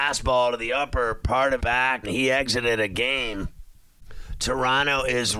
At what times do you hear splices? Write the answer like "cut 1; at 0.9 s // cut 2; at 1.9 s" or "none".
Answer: cut 1; at 1.6 s // cut 2; at 2.0 s